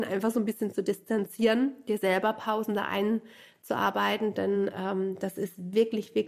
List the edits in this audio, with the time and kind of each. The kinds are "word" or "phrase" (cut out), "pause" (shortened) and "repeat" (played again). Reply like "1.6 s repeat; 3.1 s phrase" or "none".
none